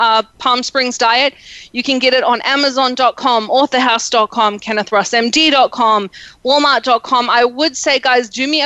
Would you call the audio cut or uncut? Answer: uncut